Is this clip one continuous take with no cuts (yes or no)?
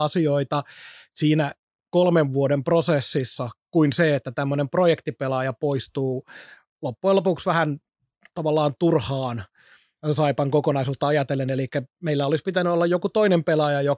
yes